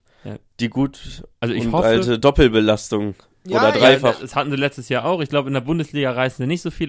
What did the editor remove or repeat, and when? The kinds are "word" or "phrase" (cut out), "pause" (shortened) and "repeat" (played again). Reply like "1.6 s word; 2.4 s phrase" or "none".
none